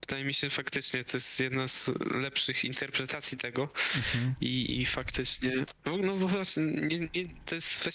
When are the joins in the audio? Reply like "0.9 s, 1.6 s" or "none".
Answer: 5.8 s